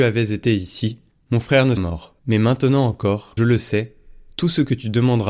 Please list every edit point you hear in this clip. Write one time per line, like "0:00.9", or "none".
0:01.1
0:01.8
0:02.2
0:03.4